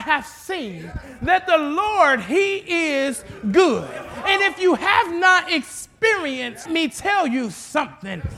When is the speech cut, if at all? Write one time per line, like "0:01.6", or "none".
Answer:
0:06.6